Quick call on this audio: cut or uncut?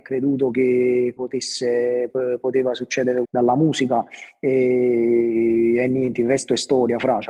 cut